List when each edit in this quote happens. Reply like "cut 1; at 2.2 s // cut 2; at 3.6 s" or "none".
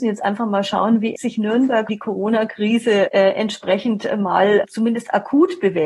cut 1; at 1.1 s // cut 2; at 1.9 s // cut 3; at 3.1 s // cut 4; at 4.6 s